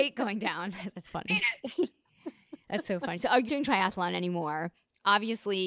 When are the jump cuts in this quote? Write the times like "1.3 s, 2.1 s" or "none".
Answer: 1.0 s, 3.5 s